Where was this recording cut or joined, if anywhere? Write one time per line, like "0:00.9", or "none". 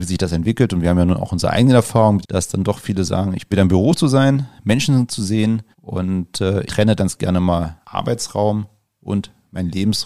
0:02.2
0:03.5
0:05.7
0:06.7
0:07.0
0:07.8

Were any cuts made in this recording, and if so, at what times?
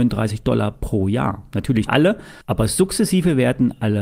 0:01.9
0:02.4

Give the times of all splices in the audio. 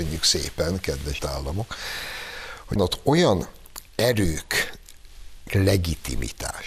0:01.2
0:02.8
0:05.5

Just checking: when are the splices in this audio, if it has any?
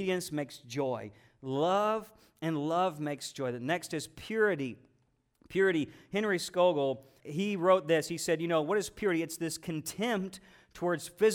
0:07.2

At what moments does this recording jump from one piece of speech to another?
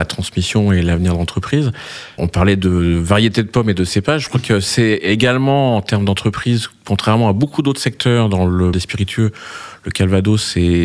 0:02.2
0:08.7

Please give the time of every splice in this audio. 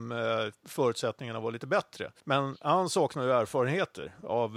0:02.2

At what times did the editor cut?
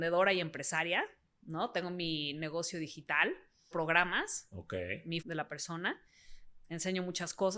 0:03.7
0:05.2

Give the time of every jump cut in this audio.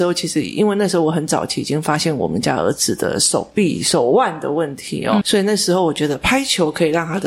0:05.2

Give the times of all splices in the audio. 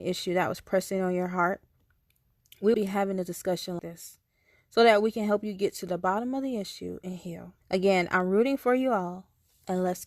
0:02.7
0:03.8
0:07.6

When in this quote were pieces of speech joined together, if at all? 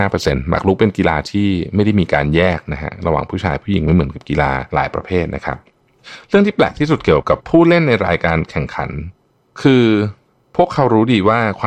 none

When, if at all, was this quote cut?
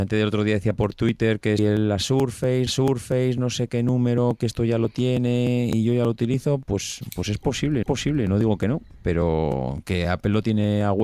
0:01.6
0:02.7
0:07.8

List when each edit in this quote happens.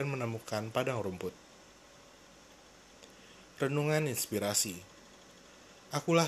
none

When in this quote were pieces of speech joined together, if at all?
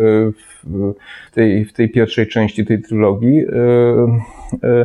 0:01.3

